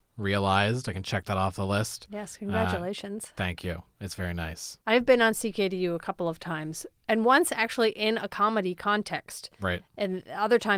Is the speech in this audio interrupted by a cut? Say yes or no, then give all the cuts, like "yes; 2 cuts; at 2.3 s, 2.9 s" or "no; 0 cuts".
yes; 1 cut; at 4.8 s